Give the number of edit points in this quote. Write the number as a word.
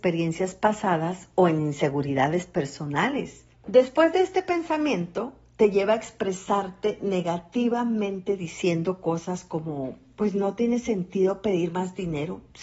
one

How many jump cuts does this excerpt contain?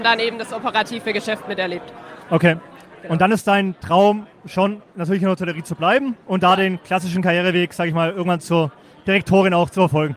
two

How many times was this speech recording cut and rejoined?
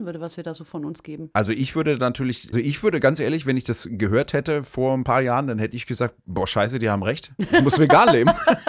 one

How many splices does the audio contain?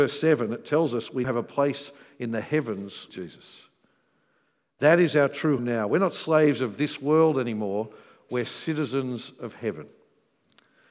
three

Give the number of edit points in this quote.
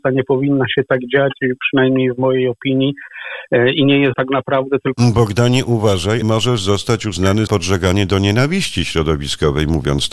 three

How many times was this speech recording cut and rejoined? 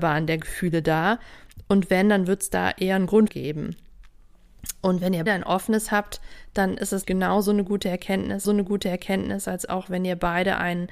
four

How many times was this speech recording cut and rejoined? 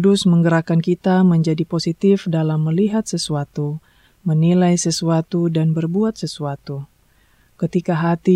zero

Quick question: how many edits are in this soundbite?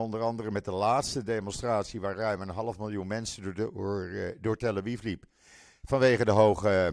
zero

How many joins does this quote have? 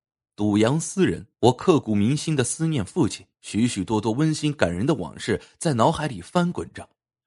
two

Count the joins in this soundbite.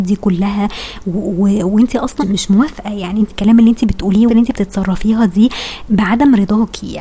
three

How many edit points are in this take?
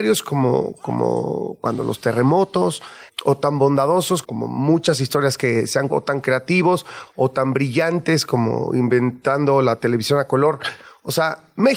three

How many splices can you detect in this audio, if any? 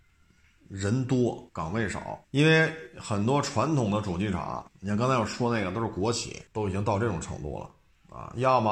four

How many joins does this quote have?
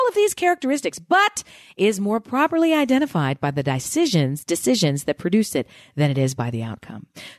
zero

